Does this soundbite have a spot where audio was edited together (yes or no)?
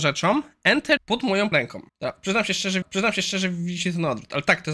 yes